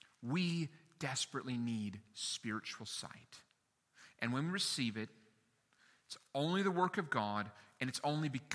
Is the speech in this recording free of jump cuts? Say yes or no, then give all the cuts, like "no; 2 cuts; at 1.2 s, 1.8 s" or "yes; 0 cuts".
yes; 0 cuts